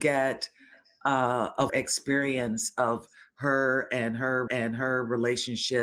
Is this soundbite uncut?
no; 2 cuts; at 1.7 s, 4.5 s

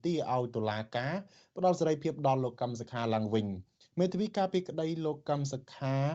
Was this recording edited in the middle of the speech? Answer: no; 0 cuts

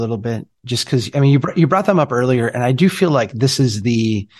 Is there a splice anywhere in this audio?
no; 0 cuts

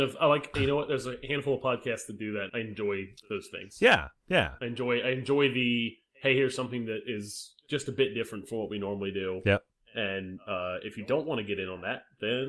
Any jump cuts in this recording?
yes; 1 cut; at 2.5 s

